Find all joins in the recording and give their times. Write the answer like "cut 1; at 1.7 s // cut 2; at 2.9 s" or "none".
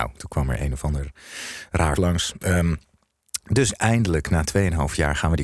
cut 1; at 2.0 s // cut 2; at 3.7 s